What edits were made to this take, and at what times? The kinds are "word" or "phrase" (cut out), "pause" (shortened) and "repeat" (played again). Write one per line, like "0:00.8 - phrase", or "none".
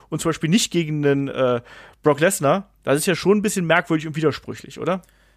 none

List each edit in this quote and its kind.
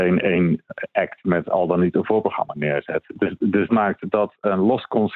0:03.7 - word

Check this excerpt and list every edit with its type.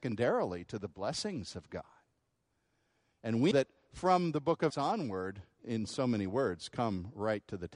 0:03.5 - word
0:04.7 - word
0:05.6 - word

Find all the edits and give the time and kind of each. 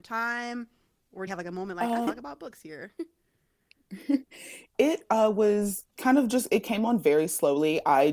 0:01.0 - pause
0:01.3 - word
0:02.1 - phrase
0:05.9 - pause

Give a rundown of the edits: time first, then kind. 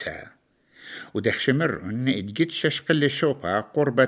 none

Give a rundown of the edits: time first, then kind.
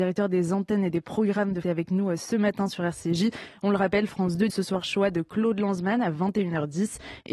0:01.6 - phrase
0:04.5 - word

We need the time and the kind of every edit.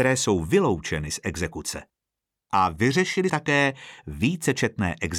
0:03.3 - word

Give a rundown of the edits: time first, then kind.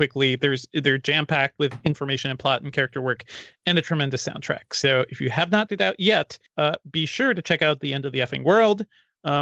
0:05.7 - word
0:06.5 - pause

